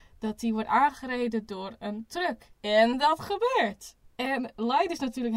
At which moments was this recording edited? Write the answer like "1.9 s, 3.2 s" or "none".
2.6 s